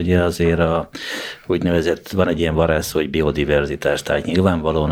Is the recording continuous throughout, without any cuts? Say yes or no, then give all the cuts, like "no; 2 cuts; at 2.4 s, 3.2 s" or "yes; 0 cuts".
yes; 0 cuts